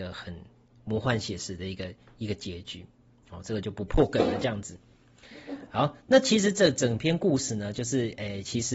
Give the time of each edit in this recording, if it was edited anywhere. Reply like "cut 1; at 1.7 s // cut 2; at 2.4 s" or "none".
none